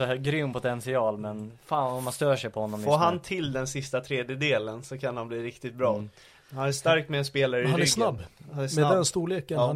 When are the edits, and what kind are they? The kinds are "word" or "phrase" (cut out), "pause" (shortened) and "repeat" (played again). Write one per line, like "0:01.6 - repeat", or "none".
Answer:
none

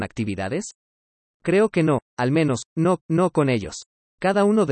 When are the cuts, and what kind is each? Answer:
0:03.0 - repeat

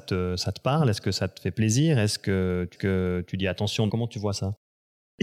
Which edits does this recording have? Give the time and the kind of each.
0:02.7 - repeat
0:03.9 - word

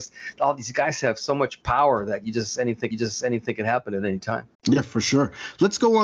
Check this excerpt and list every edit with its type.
0:02.9 - repeat
0:04.5 - pause

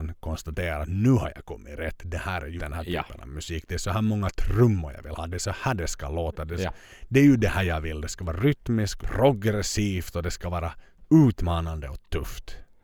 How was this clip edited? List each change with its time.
0:02.6 - word
0:09.0 - phrase

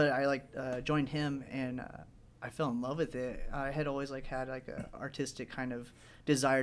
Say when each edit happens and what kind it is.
none

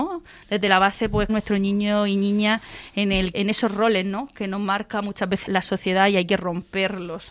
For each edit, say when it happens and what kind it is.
0:01.3 - phrase
0:03.3 - word
0:05.5 - word

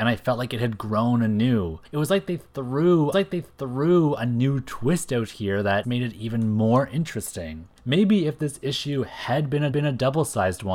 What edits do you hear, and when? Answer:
0:01.8 - pause
0:03.1 - repeat
0:05.8 - word
0:07.8 - pause
0:09.7 - repeat

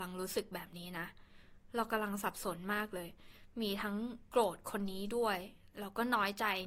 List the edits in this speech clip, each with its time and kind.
none

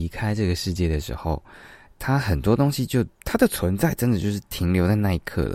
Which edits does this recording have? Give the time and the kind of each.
0:03.1 - pause

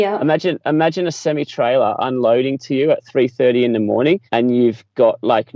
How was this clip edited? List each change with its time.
0:04.3 - pause

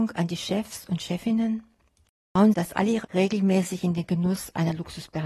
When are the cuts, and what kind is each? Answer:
0:02.5 - word
0:03.0 - word

